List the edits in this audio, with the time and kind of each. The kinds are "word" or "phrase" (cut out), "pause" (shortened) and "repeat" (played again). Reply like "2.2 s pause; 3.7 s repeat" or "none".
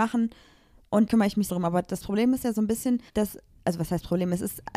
1.1 s word; 1.5 s word; 3.1 s pause